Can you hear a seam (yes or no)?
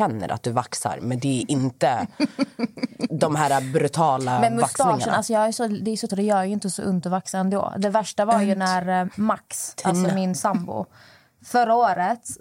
yes